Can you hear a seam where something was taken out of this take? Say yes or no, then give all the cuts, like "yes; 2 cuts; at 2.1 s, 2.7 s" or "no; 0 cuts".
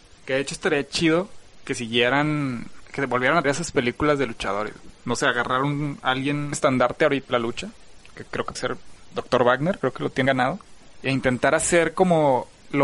yes; 6 cuts; at 3.4 s, 6.5 s, 7.3 s, 8.5 s, 9.1 s, 10.3 s